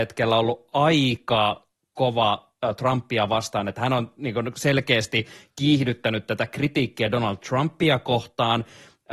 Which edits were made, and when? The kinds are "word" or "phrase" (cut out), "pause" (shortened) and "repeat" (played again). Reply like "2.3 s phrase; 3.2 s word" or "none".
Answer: none